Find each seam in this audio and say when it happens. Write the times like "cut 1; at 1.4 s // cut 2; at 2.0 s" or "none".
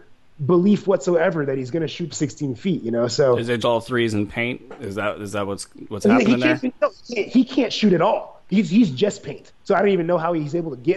cut 1; at 2.1 s // cut 2; at 3.6 s // cut 3; at 9.6 s